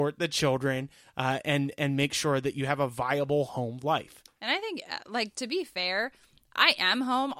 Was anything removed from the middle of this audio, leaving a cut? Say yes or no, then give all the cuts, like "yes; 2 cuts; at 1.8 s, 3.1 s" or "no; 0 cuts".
no; 0 cuts